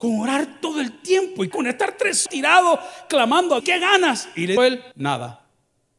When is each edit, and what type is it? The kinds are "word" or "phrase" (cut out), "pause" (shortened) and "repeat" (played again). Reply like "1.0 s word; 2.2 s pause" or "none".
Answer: 1.5 s phrase; 2.3 s word; 3.6 s phrase; 4.6 s word; 4.9 s pause